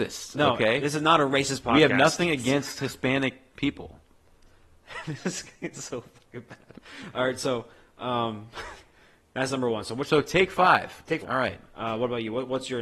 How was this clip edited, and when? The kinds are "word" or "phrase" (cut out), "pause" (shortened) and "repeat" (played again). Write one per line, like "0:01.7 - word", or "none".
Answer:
0:11.2 - phrase